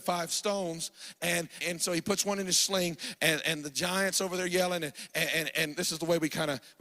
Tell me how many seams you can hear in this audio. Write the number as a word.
one